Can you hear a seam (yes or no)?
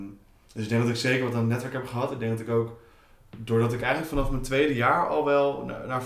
no